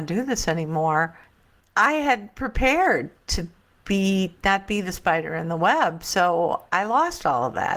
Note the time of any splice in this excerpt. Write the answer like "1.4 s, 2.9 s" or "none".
1.6 s

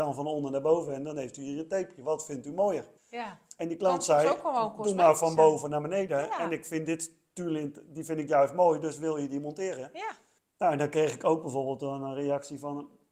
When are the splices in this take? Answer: 3.0 s, 10.4 s

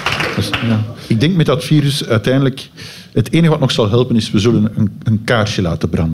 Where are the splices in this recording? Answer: none

